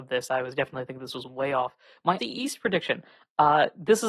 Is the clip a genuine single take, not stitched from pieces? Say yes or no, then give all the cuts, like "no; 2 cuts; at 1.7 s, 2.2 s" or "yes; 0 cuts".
no; 1 cut; at 2.2 s